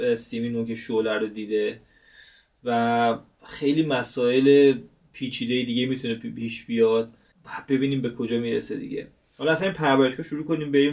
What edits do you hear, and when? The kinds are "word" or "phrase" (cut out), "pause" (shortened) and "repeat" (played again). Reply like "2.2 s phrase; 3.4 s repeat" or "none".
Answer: none